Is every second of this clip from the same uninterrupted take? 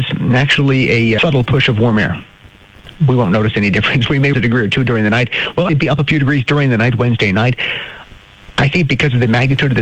no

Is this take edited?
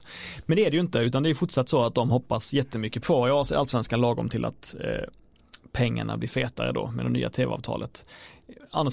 yes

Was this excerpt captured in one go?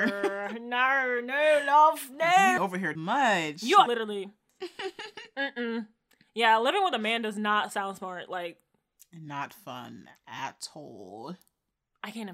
no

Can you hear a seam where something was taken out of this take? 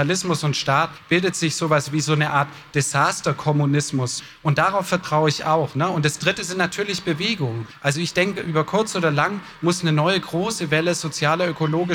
no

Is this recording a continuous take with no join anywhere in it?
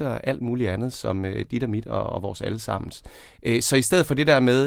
yes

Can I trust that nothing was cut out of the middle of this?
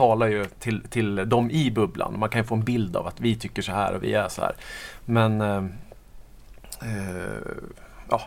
yes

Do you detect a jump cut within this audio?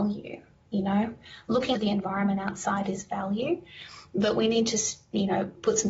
yes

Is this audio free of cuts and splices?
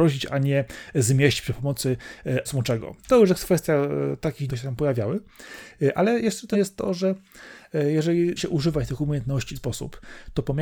no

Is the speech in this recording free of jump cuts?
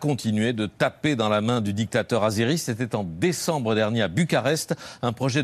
yes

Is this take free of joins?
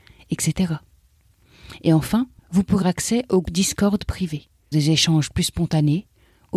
no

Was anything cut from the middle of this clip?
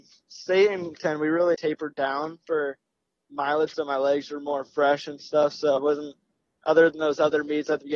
yes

